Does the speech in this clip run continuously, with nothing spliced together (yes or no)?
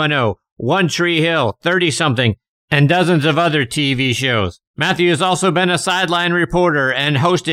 no